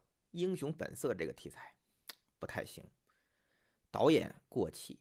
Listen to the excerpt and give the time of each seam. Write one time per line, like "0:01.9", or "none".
none